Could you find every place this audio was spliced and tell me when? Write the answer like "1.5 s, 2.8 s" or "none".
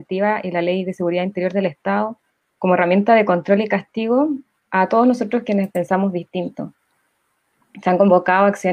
none